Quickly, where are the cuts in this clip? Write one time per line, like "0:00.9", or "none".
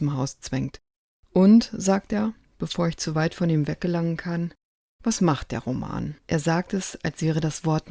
0:06.2